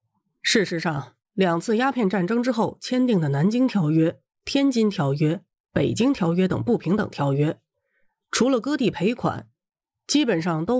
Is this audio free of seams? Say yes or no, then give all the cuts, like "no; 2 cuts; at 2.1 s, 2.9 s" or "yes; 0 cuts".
yes; 0 cuts